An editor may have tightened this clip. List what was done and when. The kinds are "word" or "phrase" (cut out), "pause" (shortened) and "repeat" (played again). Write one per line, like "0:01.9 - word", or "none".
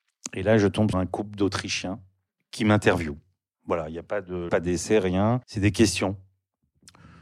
0:00.9 - word
0:04.5 - word
0:05.4 - pause

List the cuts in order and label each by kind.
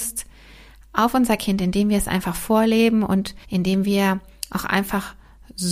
0:03.4 - pause

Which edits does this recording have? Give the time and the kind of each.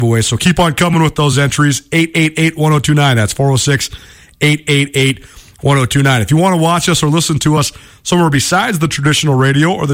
none

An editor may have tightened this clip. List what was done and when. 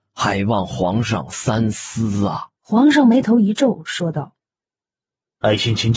0:02.5 - pause

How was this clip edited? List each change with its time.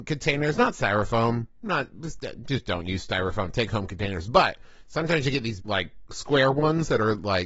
0:05.6 - word

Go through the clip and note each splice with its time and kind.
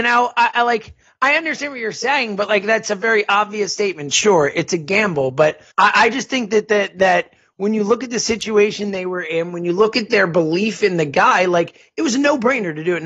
0:05.7 - pause

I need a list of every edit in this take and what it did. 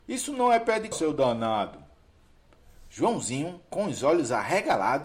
0:00.9 - word

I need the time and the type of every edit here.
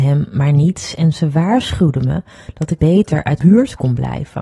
0:02.8 - word
0:03.4 - word

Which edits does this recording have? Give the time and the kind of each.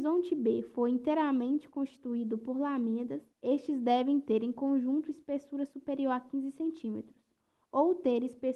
0:03.3 - pause

